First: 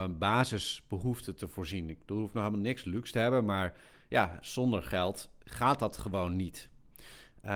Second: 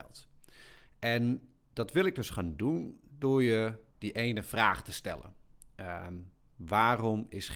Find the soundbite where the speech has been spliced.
second; 1 cut; at 3.9 s

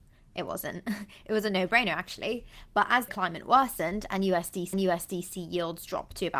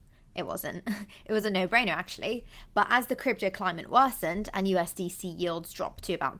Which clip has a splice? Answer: first; 2 cuts; at 3.1 s, 4.7 s

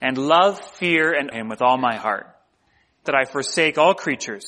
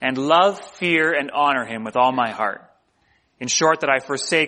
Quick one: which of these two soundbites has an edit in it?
first; 2 cuts; at 1.3 s, 3.1 s

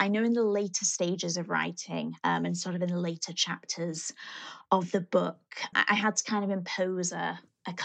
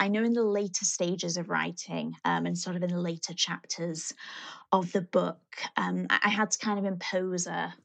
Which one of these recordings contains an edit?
first; 1 cut; at 5.7 s

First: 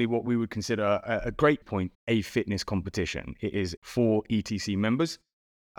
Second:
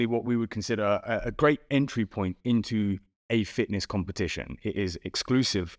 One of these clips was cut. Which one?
first; 3 cuts; at 1.6 s, 1.9 s, 3.8 s

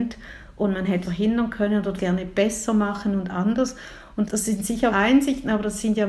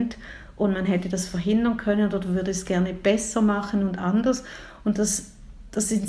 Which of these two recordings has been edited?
first; 4 cuts; at 1.0 s, 2.0 s, 4.3 s, 4.9 s

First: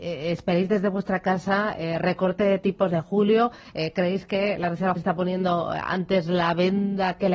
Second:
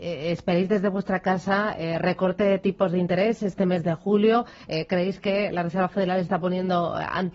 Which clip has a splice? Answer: first; 2 cuts; at 2.9 s, 5.0 s

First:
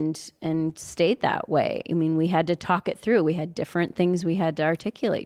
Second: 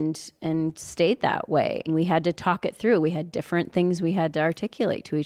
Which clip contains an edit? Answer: second; 1 cut; at 1.9 s

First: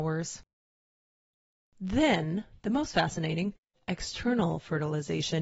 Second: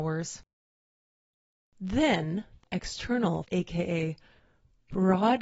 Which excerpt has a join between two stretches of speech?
second; 2 cuts; at 2.6 s, 3.4 s

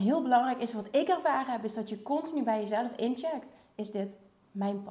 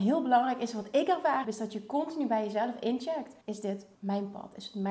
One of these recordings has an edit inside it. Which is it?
second; 3 cuts; at 1.4 s, 3.4 s, 3.9 s

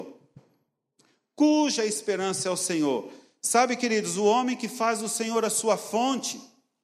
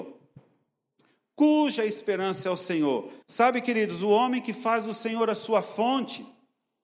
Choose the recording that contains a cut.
second; 1 cut; at 3.2 s

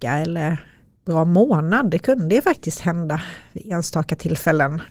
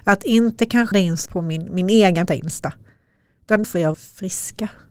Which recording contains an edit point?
second; 5 cuts; at 0.9 s, 1.3 s, 2.3 s, 3.6 s, 3.9 s

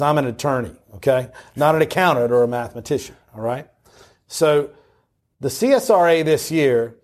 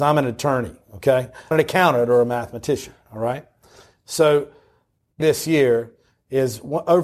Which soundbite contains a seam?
second; 2 cuts; at 1.5 s, 5.2 s

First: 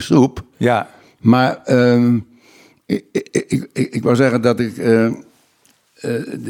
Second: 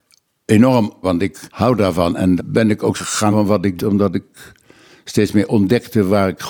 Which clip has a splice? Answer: second; 6 cuts; at 1.0 s, 1.5 s, 2.4 s, 2.9 s, 3.3 s, 3.8 s

